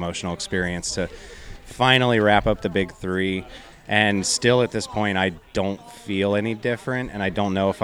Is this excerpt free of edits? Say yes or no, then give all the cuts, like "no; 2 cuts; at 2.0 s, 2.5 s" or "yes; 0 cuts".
yes; 0 cuts